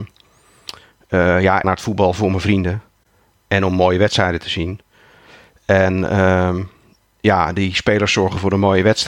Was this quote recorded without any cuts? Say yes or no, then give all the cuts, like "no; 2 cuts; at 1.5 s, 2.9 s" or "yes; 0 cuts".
no; 1 cut; at 1.6 s